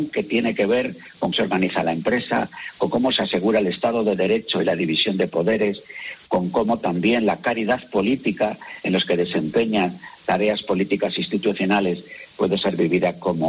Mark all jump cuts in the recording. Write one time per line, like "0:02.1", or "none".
0:01.3